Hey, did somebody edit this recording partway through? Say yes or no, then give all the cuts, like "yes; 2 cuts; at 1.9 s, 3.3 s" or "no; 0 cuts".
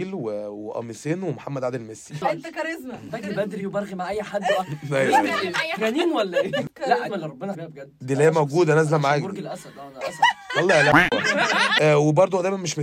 yes; 4 cuts; at 3.6 s, 5.8 s, 7.1 s, 7.5 s